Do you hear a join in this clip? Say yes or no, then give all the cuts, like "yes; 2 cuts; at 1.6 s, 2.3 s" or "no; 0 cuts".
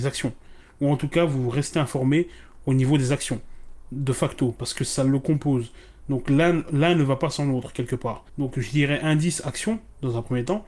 yes; 1 cut; at 8.3 s